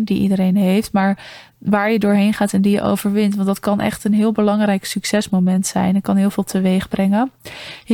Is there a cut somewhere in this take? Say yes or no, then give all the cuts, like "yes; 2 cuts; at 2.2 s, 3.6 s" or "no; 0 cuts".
no; 0 cuts